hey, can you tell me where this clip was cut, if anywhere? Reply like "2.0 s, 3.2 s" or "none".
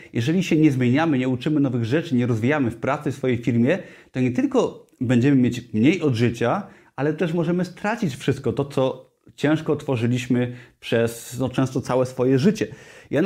none